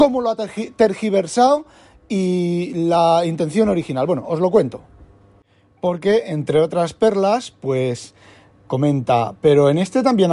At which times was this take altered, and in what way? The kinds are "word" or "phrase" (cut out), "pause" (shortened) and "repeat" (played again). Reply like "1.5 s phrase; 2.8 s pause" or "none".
none

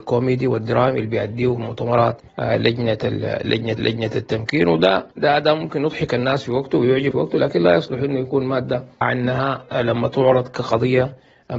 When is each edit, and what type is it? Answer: 1.6 s word; 2.3 s pause; 3.8 s repeat; 5.1 s pause; 7.1 s word; 9.0 s word

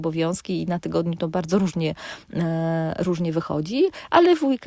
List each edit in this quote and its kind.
none

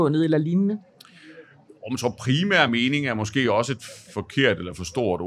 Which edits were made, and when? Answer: none

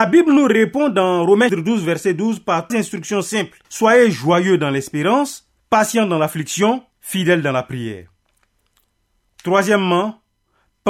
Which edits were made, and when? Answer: 1.5 s word; 2.7 s word; 3.6 s pause; 5.6 s pause; 6.9 s pause

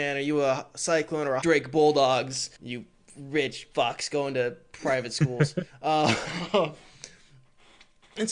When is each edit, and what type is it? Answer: 1.4 s phrase; 2.5 s pause; 3.7 s pause

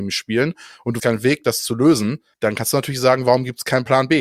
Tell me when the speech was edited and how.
1.0 s word; 2.3 s pause

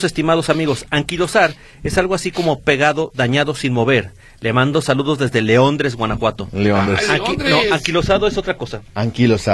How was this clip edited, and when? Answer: none

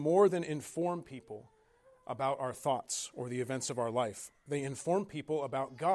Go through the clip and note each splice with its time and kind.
none

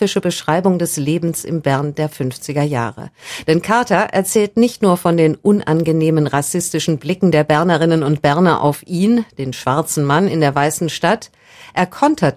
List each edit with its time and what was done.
none

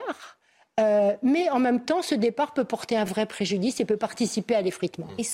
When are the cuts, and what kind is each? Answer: none

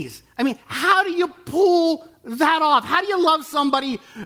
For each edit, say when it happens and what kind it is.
none

